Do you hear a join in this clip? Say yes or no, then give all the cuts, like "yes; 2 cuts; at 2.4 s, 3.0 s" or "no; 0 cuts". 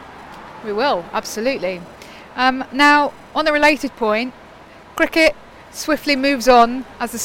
no; 0 cuts